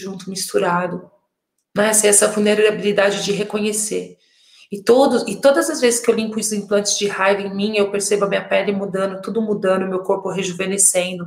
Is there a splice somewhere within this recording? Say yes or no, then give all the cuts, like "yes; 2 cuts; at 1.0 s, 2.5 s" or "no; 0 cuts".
no; 0 cuts